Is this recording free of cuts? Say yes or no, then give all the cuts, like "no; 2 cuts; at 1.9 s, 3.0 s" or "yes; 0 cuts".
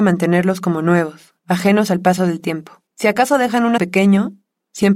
no; 3 cuts; at 1.4 s, 2.9 s, 3.8 s